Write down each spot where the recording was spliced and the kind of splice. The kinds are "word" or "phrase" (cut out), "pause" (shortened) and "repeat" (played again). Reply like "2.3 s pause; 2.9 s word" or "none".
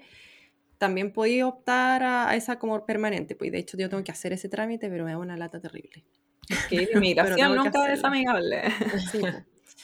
none

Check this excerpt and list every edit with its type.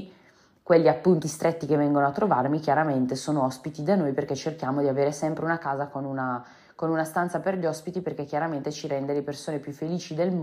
1.2 s word

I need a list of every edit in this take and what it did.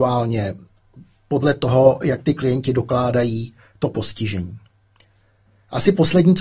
none

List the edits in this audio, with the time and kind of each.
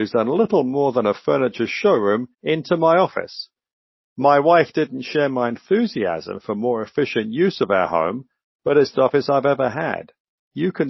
2.3 s pause; 8.9 s phrase

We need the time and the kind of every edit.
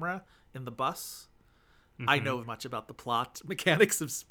2.4 s word

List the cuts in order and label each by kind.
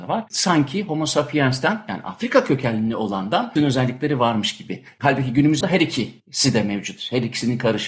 3.6 s phrase; 5.6 s word

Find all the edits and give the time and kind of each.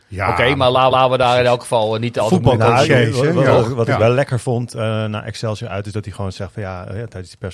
0.9 s repeat

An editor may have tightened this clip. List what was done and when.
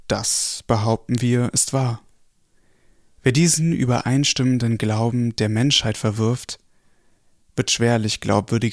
none

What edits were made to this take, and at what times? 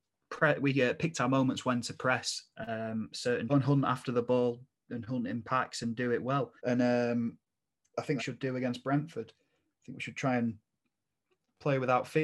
3.5 s phrase; 6.6 s pause; 8.2 s phrase

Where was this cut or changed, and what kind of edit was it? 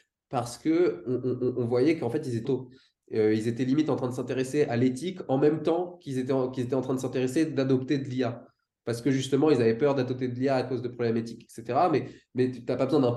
2.4 s word

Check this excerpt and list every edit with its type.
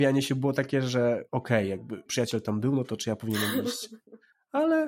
1.3 s pause; 2.1 s word

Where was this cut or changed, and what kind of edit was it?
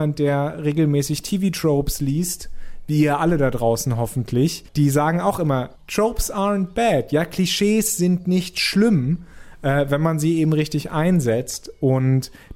5.8 s pause

